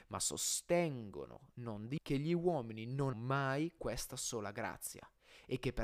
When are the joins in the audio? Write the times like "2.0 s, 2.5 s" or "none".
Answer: 2.0 s, 3.1 s, 3.8 s